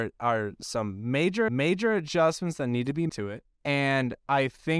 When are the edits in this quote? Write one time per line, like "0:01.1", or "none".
0:01.5
0:03.1
0:03.5